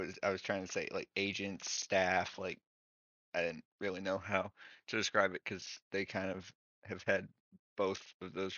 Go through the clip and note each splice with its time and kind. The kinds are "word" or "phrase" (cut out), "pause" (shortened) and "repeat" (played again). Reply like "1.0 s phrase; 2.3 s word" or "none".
none